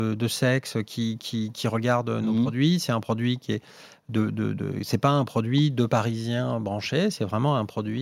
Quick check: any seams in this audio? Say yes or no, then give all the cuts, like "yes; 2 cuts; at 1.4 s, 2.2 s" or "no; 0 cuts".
no; 0 cuts